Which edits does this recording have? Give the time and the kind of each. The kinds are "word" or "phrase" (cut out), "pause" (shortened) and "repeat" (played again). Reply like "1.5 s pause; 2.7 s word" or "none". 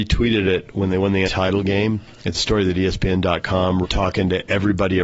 1.3 s word; 2.4 s word; 3.8 s word